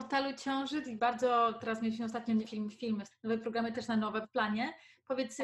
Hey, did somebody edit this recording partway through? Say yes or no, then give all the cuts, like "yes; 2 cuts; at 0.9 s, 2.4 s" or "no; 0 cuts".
yes; 5 cuts; at 1.0 s, 2.4 s, 3.1 s, 3.7 s, 4.2 s